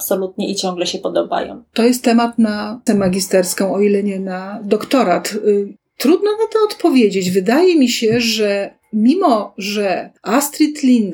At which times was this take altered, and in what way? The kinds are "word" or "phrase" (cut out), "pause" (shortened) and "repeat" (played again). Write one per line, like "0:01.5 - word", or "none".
0:02.9 - word
0:05.8 - pause
0:10.2 - pause

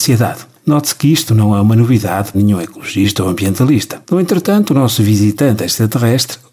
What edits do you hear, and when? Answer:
0:02.3 - word
0:04.0 - pause

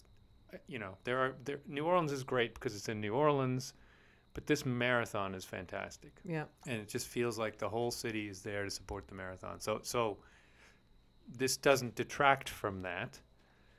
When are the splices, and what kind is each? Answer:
0:06.5 - pause

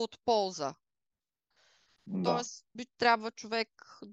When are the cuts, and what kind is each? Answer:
0:02.8 - word

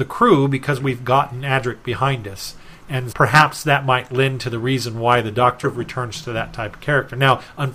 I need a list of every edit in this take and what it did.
0:03.1 - word
0:05.6 - word

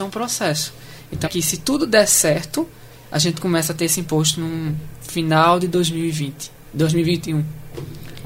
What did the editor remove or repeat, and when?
0:01.2 - phrase

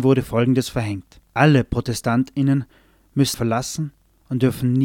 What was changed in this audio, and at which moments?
0:01.3 - pause
0:03.3 - phrase

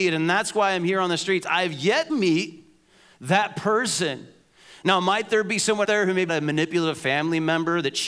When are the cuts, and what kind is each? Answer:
0:02.1 - word
0:05.8 - word
0:06.3 - word

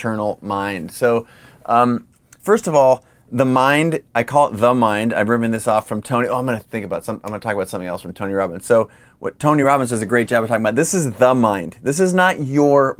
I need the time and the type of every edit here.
none

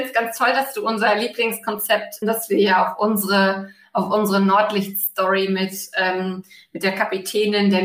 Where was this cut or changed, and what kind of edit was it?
0:02.2 - phrase

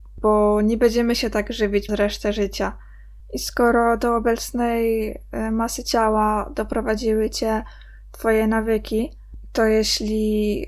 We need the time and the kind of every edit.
0:01.9 - word

